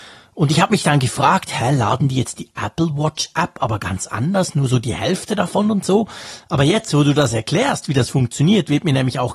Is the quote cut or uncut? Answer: uncut